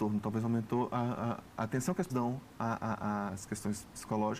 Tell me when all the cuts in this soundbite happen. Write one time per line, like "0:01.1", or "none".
0:02.1